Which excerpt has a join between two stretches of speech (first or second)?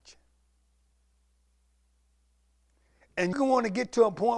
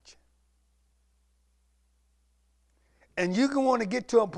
first